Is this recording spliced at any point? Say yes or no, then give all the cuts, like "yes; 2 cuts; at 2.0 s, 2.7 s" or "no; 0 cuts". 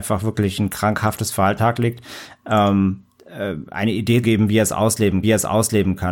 yes; 3 cuts; at 1.6 s, 4.2 s, 5.2 s